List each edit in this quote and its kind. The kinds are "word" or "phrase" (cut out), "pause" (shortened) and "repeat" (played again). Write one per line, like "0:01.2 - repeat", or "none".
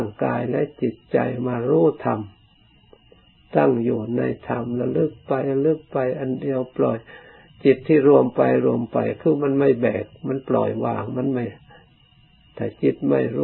none

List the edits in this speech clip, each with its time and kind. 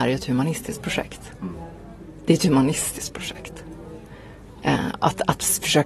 none

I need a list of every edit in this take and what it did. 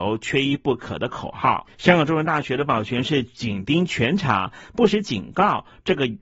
0:01.7 - pause

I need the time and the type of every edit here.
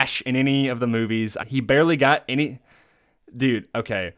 0:01.4 - word

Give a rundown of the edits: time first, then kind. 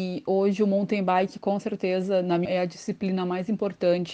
0:02.5 - word

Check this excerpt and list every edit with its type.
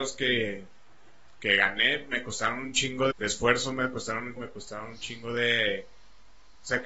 0:03.1 - word
0:04.4 - phrase

